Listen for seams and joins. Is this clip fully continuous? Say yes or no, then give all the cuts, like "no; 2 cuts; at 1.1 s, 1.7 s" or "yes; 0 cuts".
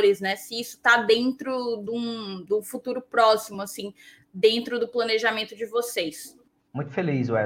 yes; 0 cuts